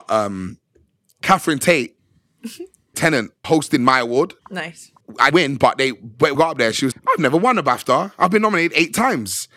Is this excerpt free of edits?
no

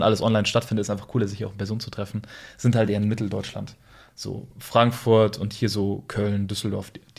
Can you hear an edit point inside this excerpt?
no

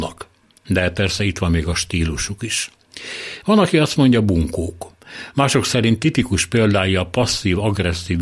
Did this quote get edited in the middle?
no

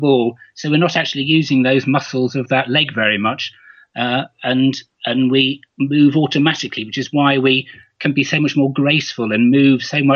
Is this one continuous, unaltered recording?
yes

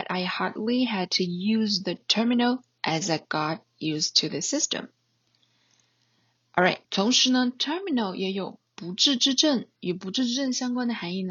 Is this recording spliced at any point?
yes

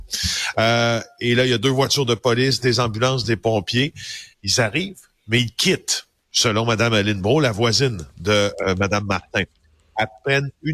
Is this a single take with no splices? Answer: no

